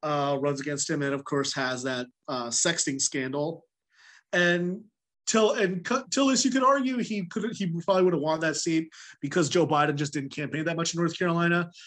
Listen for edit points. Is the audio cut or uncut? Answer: uncut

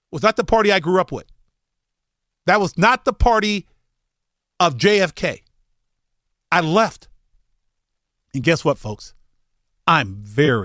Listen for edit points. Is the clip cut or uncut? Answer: uncut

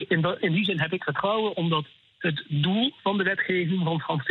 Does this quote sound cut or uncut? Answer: uncut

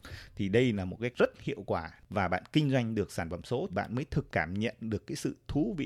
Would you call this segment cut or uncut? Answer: cut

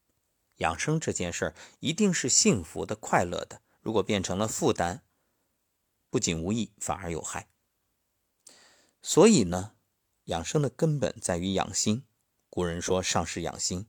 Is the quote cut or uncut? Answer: cut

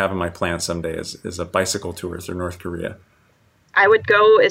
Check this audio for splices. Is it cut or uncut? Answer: uncut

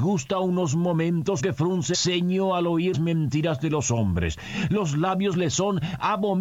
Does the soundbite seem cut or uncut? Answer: cut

